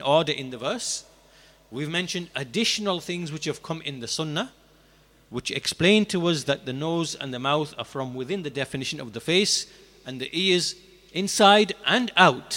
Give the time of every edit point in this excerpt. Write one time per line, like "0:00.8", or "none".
none